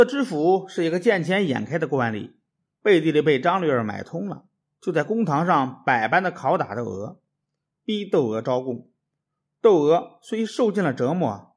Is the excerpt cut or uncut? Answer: uncut